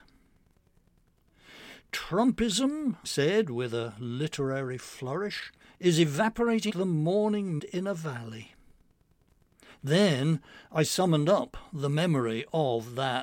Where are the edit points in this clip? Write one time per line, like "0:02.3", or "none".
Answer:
0:03.0
0:05.6
0:06.7
0:07.6